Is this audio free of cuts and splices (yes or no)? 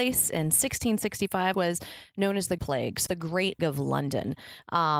no